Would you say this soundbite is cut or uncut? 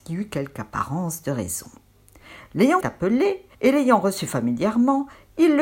cut